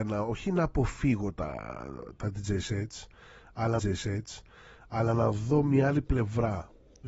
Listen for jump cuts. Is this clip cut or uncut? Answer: cut